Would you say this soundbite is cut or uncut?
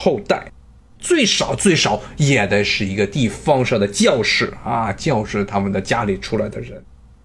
uncut